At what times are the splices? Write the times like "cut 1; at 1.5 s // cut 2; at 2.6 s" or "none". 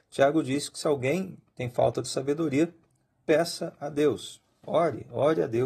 none